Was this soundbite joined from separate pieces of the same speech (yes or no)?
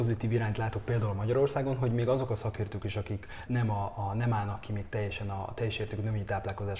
yes